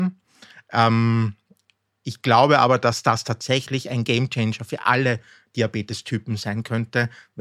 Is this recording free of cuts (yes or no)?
yes